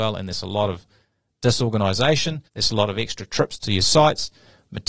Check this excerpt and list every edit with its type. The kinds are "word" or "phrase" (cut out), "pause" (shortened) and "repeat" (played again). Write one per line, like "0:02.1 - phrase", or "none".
0:02.5 - pause